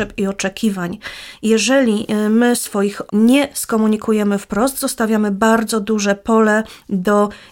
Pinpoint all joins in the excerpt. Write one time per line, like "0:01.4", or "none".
0:03.1

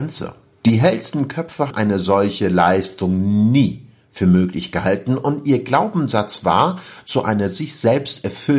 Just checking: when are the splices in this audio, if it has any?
0:01.7

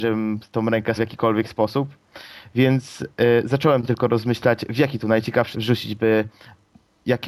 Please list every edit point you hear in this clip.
0:01.0
0:05.5

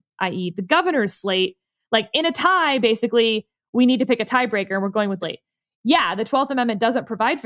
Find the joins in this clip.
0:05.2

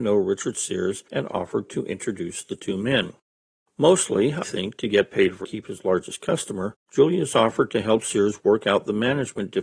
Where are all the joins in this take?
0:04.4
0:05.4
0:06.8

